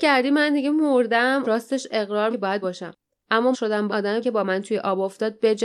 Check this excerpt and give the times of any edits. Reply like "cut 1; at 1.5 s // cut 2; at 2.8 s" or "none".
cut 1; at 1.4 s // cut 2; at 2.3 s // cut 3; at 2.6 s // cut 4; at 3.5 s // cut 5; at 3.9 s // cut 6; at 4.2 s